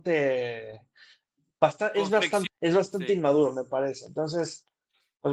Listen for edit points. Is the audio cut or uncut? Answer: cut